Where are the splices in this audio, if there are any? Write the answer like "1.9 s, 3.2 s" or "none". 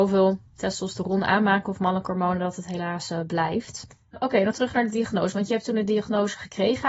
4.5 s